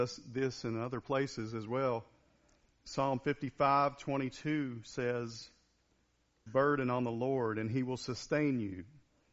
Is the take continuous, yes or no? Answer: no